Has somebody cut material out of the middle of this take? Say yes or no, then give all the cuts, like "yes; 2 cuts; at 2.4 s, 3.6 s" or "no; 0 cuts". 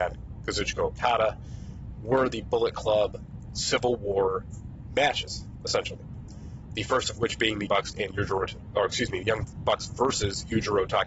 yes; 1 cut; at 7.7 s